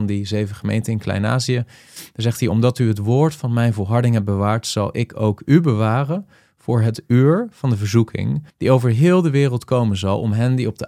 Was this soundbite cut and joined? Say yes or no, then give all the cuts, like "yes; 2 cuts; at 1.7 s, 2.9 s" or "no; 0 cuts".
yes; 1 cut; at 8.5 s